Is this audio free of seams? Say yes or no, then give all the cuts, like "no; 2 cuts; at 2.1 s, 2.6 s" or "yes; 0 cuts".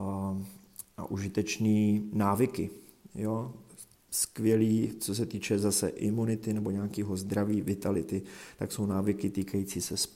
yes; 0 cuts